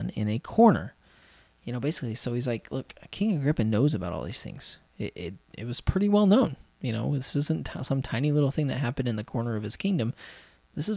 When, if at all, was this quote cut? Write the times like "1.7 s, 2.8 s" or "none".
none